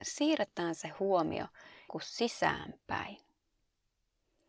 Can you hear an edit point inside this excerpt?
yes; 1 cut; at 1.9 s

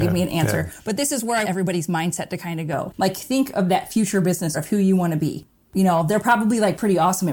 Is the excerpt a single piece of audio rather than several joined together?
no; 2 cuts; at 1.4 s, 4.5 s

